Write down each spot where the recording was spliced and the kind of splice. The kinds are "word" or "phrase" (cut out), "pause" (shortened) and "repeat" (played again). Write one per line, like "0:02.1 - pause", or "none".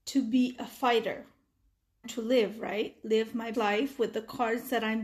0:02.0 - word
0:03.5 - word